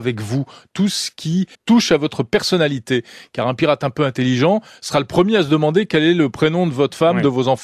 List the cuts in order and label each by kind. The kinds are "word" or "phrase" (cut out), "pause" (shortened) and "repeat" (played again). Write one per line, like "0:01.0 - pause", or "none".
0:01.5 - pause